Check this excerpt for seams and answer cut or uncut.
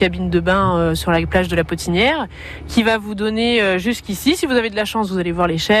uncut